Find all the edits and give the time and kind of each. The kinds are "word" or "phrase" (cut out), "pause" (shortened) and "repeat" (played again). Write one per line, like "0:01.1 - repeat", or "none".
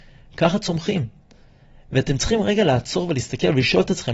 none